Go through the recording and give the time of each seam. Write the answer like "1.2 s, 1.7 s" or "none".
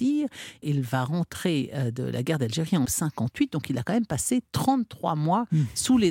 2.9 s

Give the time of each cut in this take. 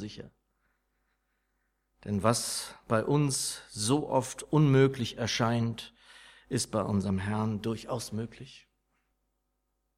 none

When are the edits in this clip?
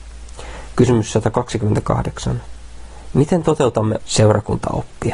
4.0 s

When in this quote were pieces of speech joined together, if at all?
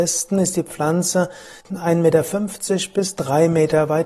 1.6 s

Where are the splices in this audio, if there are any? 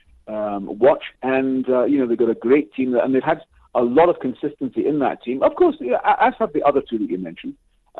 1.1 s

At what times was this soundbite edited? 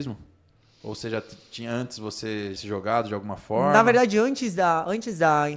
2.6 s

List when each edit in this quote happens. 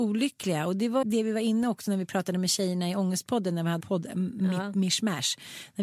1.0 s, 3.8 s

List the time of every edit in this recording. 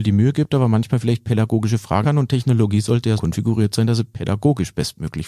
2.0 s, 3.2 s

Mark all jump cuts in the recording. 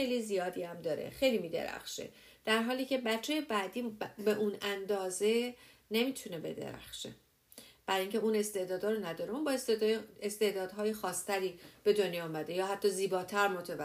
none

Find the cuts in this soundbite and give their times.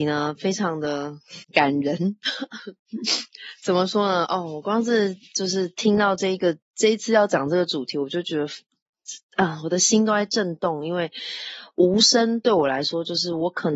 1.4 s

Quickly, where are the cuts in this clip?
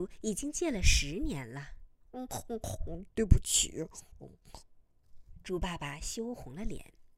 2.0 s

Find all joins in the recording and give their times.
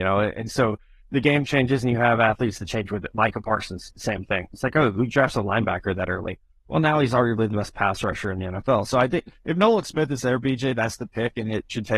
none

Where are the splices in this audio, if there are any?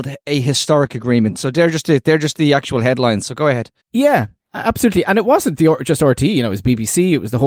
3.8 s

